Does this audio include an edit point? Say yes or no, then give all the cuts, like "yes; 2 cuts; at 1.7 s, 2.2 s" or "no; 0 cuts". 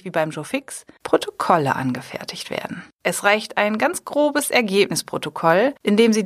no; 0 cuts